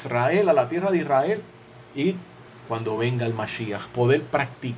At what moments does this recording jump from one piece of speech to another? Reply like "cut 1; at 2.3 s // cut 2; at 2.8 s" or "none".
none